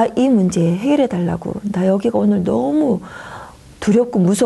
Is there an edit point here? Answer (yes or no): no